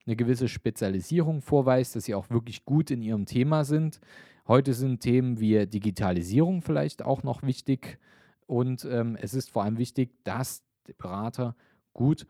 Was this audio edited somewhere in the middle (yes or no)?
no